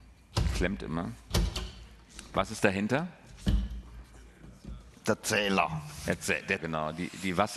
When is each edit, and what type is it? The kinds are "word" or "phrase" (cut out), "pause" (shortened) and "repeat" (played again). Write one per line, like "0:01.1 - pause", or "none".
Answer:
0:06.6 - word